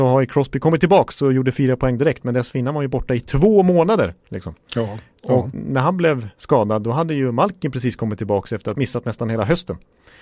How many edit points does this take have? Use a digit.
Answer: 1